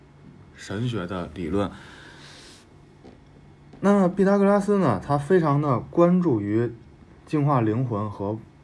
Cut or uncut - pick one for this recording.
uncut